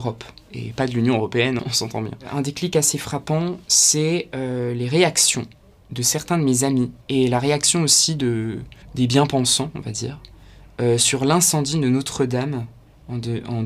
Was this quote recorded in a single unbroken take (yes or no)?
no